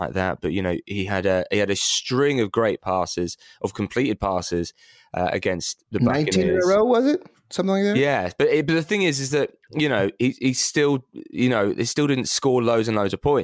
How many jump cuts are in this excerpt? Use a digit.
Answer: 0